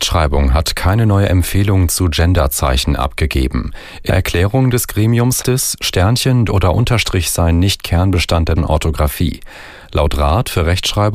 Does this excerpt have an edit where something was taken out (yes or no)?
yes